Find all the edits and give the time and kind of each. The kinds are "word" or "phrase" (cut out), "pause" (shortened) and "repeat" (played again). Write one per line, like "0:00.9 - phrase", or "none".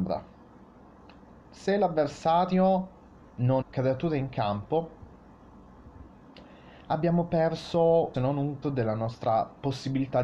0:03.6 - word
0:08.1 - phrase
0:08.6 - word